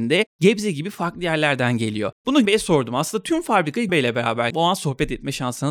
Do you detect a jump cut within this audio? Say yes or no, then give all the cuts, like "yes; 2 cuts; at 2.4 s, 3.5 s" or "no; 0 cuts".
yes; 3 cuts; at 2.5 s, 3.9 s, 4.5 s